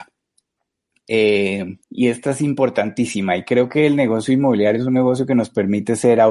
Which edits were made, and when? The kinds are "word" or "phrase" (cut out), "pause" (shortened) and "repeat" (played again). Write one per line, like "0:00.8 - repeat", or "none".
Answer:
0:01.8 - pause

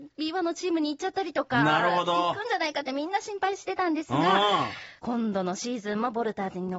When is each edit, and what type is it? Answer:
0:05.0 - pause

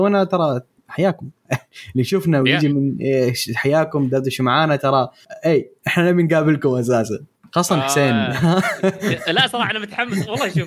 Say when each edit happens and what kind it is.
none

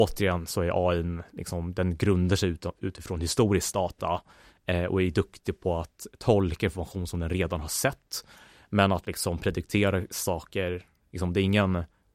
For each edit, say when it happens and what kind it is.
none

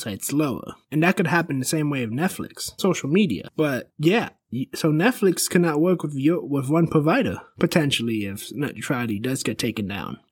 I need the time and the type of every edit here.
0:02.8 - word

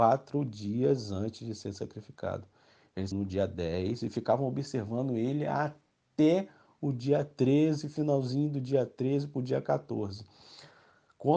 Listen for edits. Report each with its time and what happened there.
0:03.1 - phrase

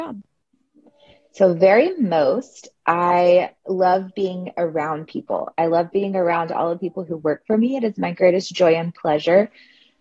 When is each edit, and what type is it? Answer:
0:03.6 - pause

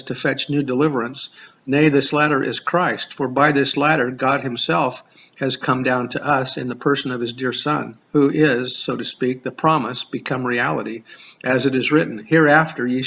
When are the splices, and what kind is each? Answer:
0:08.0 - pause

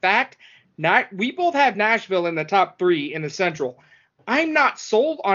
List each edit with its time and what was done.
none

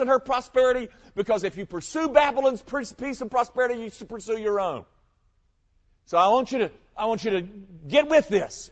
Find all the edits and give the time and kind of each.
none

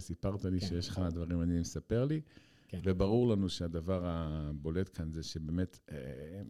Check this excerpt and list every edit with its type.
none

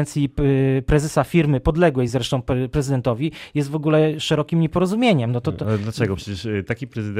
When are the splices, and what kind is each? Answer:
none

